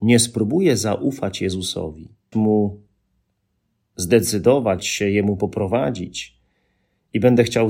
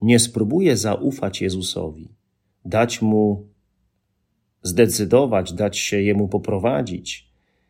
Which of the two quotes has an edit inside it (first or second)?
first